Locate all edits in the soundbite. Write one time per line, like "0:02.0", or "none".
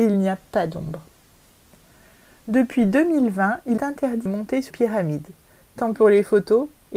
0:03.8
0:04.3
0:04.7
0:05.9